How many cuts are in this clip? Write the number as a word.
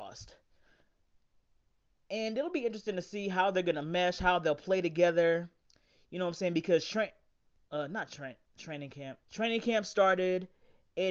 one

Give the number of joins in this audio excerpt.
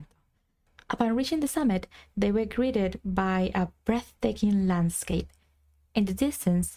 zero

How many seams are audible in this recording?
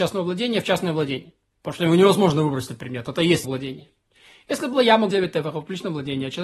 two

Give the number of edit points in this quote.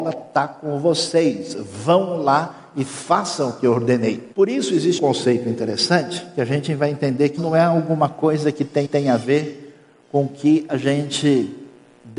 four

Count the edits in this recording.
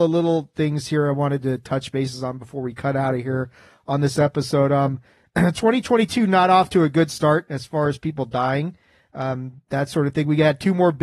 zero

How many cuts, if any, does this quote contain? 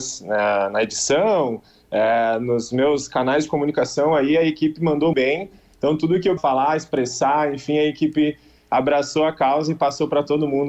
two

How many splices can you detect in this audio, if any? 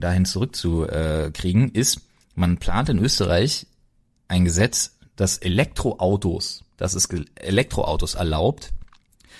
zero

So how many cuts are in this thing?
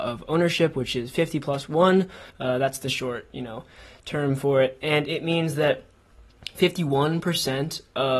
one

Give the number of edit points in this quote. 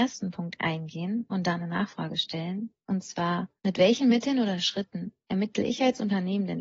one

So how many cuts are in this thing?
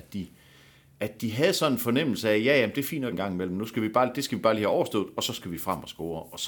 one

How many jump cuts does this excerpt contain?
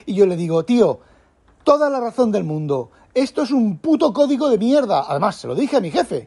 zero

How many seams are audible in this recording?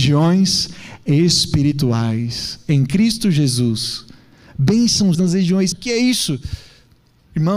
two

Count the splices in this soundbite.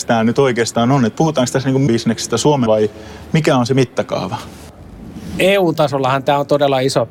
two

